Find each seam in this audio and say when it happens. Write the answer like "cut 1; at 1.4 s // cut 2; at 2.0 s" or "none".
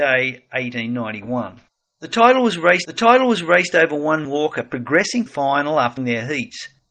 cut 1; at 1.7 s // cut 2; at 2.8 s // cut 3; at 4.2 s // cut 4; at 5.3 s // cut 5; at 6.0 s